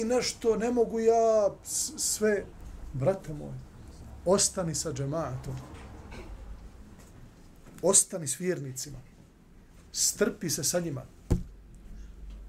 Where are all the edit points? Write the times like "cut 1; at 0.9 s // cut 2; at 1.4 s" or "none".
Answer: cut 1; at 9.9 s